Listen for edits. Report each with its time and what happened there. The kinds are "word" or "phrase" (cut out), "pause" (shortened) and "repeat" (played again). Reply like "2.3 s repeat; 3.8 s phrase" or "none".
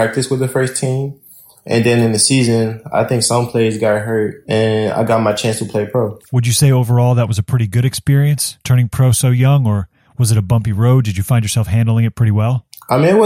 8.6 s pause